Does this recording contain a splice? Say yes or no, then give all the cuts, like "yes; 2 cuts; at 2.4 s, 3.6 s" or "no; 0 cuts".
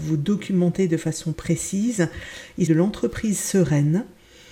yes; 2 cuts; at 1.3 s, 2.7 s